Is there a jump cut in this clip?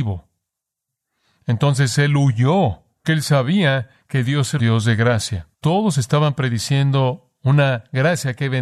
yes; 3 cuts; at 3.0 s, 4.6 s, 5.5 s

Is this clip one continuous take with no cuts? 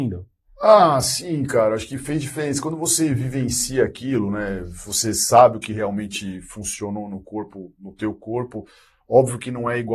yes; 0 cuts

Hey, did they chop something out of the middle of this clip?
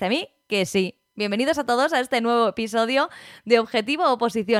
no; 0 cuts

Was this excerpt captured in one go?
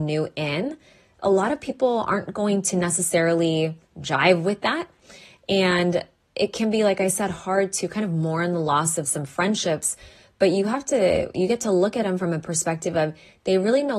yes; 0 cuts

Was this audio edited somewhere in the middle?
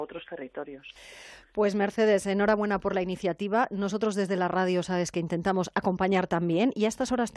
no; 0 cuts

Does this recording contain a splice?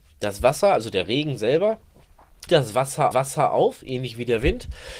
yes; 2 cuts; at 2.5 s, 3.1 s

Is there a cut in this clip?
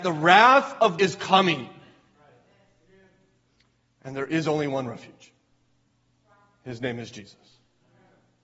yes; 1 cut; at 1.0 s

